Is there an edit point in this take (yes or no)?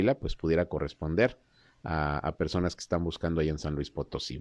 no